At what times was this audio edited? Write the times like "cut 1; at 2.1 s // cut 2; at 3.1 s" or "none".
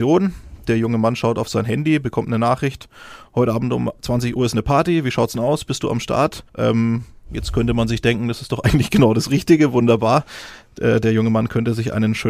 cut 1; at 6.5 s